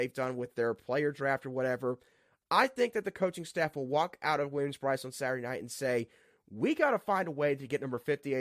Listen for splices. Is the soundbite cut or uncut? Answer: uncut